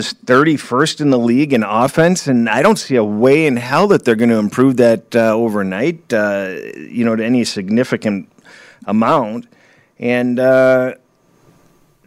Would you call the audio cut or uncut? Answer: uncut